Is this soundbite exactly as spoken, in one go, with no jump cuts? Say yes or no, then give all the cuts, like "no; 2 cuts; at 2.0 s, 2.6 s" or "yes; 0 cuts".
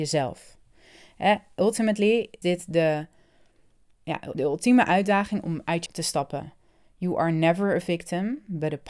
no; 3 cuts; at 2.4 s, 4.3 s, 5.9 s